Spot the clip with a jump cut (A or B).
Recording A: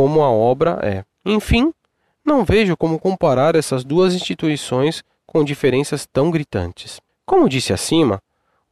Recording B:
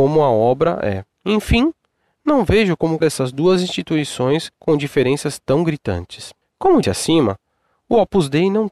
B